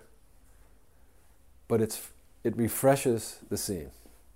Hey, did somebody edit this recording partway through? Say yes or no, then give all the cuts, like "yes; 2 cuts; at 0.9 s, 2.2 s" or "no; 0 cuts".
no; 0 cuts